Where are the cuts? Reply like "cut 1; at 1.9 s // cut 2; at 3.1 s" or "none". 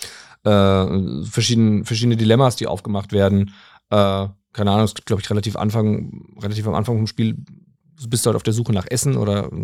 none